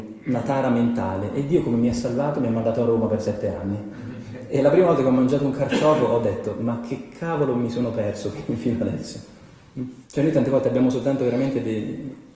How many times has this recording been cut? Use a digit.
1